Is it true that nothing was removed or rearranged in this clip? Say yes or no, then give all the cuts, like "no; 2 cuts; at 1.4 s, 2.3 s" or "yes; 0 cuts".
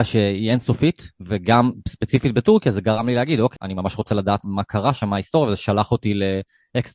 no; 2 cuts; at 3.6 s, 4.4 s